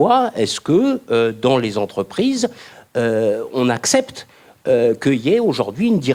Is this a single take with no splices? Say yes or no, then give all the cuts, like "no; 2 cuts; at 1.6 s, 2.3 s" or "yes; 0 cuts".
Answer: yes; 0 cuts